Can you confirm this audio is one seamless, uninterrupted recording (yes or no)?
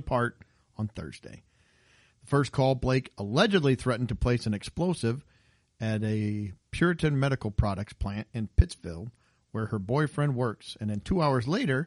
yes